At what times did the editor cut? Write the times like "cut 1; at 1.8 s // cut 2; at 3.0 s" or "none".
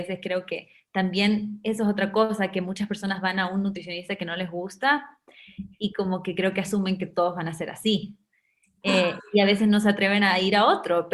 none